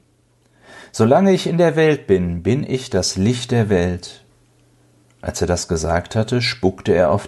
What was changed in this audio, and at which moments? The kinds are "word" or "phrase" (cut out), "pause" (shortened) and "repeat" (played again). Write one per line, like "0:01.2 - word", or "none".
none